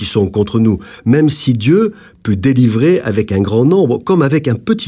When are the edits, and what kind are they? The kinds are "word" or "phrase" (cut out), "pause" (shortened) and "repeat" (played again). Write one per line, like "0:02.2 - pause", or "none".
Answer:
none